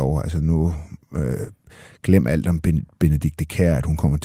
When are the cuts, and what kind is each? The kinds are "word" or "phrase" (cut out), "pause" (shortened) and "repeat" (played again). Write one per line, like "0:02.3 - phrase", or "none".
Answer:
none